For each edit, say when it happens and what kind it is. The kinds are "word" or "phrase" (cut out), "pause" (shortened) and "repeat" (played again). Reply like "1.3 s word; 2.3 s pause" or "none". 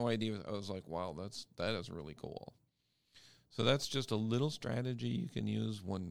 none